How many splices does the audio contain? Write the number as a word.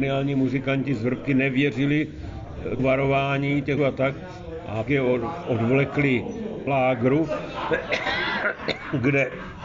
four